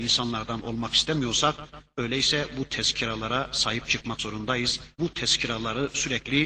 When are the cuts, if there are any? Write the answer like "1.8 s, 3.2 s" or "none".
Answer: 4.9 s